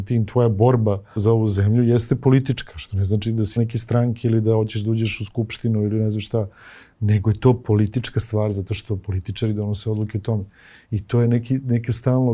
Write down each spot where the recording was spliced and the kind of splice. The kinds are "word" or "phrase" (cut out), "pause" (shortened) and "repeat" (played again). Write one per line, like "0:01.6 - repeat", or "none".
0:01.2 - word
0:03.6 - word